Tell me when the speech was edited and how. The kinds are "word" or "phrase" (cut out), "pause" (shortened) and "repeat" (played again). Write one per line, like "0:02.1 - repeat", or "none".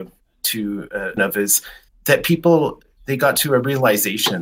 0:01.2 - phrase
0:01.9 - pause